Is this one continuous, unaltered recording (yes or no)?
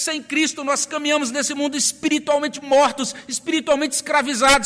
yes